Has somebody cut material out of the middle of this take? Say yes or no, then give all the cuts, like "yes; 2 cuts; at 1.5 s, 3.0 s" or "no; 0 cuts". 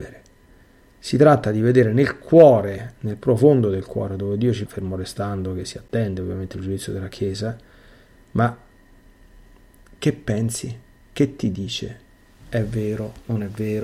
yes; 1 cut; at 4.7 s